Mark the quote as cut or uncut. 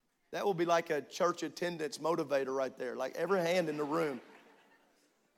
uncut